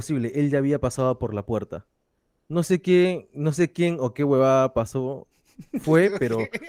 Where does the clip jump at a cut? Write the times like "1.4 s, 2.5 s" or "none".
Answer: none